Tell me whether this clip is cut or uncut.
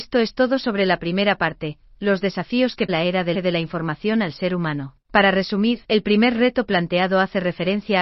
cut